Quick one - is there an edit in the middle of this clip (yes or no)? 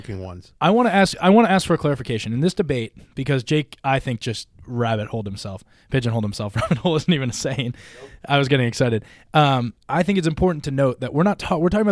yes